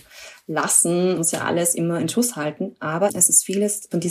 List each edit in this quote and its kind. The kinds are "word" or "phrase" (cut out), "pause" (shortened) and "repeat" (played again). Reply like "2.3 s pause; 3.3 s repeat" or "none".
1.2 s word; 3.1 s word